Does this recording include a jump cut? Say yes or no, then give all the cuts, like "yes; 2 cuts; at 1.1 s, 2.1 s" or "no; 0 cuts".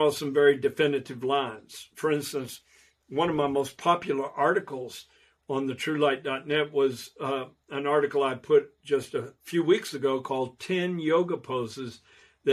no; 0 cuts